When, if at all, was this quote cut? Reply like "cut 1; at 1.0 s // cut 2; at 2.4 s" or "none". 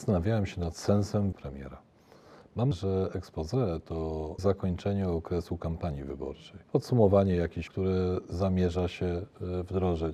cut 1; at 1.3 s // cut 2; at 2.7 s // cut 3; at 4.4 s // cut 4; at 6.6 s // cut 5; at 7.7 s